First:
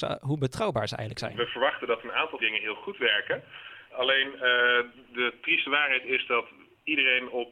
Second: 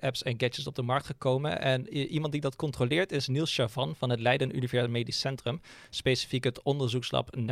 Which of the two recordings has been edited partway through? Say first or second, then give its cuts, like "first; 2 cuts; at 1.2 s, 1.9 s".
first; 1 cut; at 2.4 s